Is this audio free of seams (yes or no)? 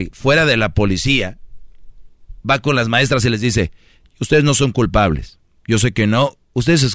yes